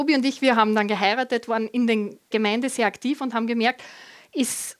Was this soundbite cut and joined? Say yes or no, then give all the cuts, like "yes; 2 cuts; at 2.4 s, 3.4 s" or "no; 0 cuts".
yes; 1 cut; at 2.3 s